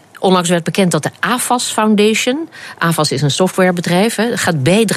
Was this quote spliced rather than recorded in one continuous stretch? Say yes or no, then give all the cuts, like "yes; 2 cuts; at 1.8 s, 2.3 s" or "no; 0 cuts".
no; 0 cuts